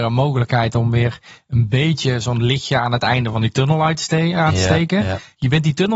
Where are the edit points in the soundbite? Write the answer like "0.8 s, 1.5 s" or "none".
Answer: none